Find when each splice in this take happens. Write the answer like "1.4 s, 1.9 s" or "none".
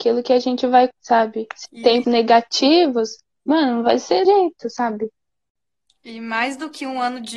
0.9 s, 1.7 s, 2.0 s, 4.2 s